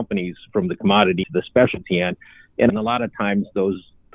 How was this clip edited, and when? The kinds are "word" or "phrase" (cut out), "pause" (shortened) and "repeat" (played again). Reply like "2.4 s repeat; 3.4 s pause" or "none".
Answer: 1.2 s word; 2.7 s word